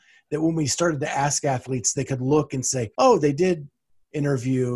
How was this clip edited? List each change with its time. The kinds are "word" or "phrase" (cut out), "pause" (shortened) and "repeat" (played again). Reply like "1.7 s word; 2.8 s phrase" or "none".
2.9 s pause